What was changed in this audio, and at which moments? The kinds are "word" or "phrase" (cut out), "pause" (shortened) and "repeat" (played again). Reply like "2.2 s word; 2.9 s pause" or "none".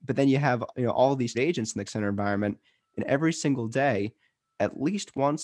1.3 s word; 1.9 s word

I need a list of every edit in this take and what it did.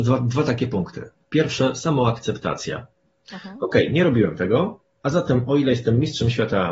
none

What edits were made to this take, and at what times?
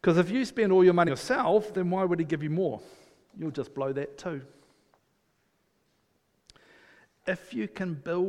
1.1 s word

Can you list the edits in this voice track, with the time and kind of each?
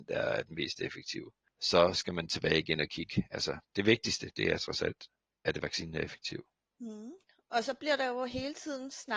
none

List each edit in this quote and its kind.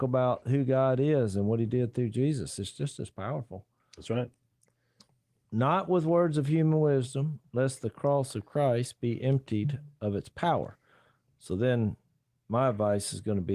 none

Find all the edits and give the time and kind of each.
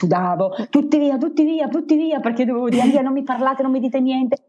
1.7 s repeat; 2.7 s word

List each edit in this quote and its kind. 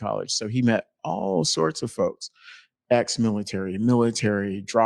none

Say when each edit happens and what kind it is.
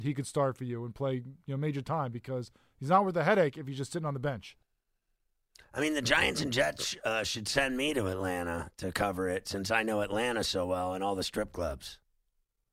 none

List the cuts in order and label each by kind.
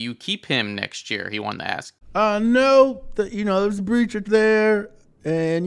2.0 s pause; 4.2 s word

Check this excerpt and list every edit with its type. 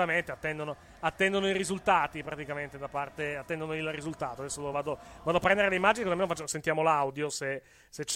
none

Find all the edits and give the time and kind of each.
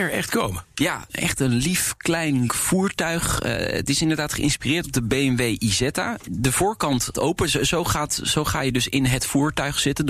2.5 s word; 7.1 s word

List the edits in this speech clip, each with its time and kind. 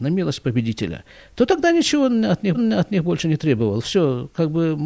2.5 s repeat

